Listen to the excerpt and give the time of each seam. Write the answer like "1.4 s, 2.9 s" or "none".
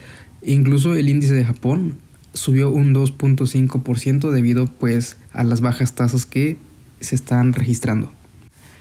none